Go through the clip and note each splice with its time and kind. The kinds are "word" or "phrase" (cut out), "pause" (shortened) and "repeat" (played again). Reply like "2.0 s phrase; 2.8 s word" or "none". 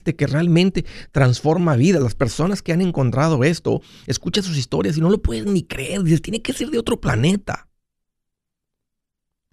none